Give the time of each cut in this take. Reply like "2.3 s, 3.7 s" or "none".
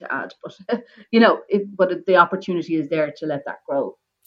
none